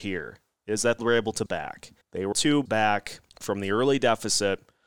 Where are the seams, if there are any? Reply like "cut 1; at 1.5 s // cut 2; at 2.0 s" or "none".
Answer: cut 1; at 1.0 s // cut 2; at 1.5 s // cut 3; at 2.0 s // cut 4; at 2.3 s // cut 5; at 2.7 s // cut 6; at 3.3 s